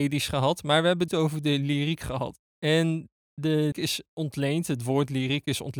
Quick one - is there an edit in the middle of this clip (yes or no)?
yes